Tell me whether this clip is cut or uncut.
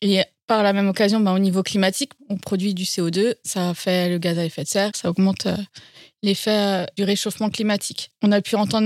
cut